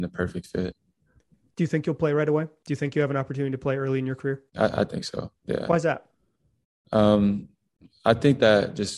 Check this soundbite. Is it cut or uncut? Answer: cut